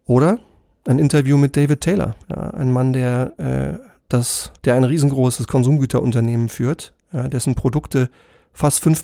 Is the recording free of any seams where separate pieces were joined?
no; 2 cuts; at 2.2 s, 4.6 s

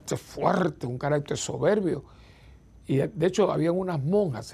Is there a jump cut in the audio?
no; 0 cuts

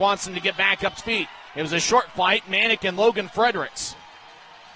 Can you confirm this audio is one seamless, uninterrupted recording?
no; 1 cut; at 1.0 s

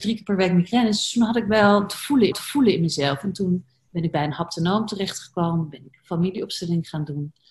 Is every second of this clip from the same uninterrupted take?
no; 1 cut; at 2.3 s

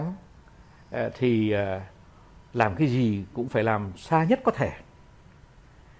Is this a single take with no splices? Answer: yes; 0 cuts

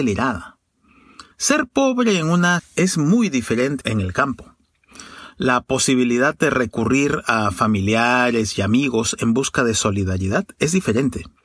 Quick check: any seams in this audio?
yes; 3 cuts; at 1.3 s, 2.6 s, 3.8 s

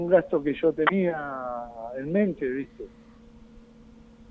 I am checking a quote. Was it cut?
no; 0 cuts

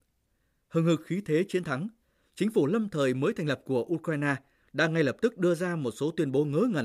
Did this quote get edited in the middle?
no; 0 cuts

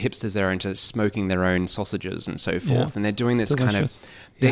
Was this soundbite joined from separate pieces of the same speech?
no; 0 cuts

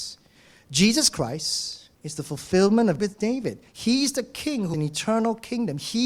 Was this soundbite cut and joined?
yes; 4 cuts; at 1.9 s, 3.0 s, 3.7 s, 4.7 s

